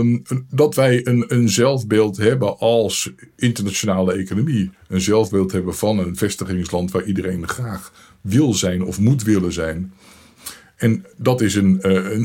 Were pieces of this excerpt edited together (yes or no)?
no